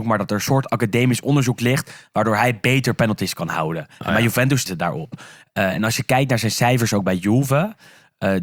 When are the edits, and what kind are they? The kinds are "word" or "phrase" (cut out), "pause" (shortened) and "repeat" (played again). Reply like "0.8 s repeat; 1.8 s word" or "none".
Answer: 4.7 s word